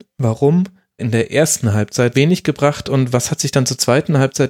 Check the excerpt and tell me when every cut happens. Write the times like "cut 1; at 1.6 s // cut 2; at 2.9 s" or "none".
cut 1; at 1.0 s // cut 2; at 2.1 s // cut 3; at 2.8 s